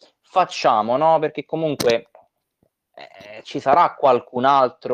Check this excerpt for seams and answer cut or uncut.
uncut